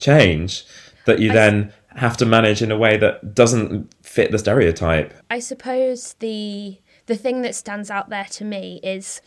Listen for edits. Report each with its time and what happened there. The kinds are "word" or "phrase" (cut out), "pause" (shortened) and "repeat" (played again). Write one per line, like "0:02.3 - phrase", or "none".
0:05.2 - pause